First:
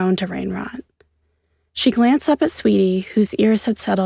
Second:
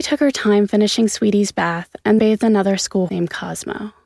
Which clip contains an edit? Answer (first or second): second